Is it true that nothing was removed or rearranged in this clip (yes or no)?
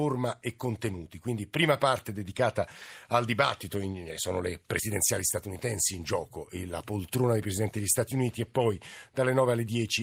yes